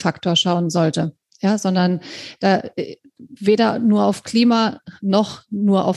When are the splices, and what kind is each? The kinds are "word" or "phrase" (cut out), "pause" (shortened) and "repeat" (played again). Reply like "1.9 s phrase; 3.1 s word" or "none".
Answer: 1.3 s pause